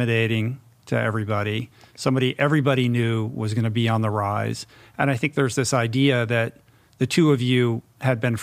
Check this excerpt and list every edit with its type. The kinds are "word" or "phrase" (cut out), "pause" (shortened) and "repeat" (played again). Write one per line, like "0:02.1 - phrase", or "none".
none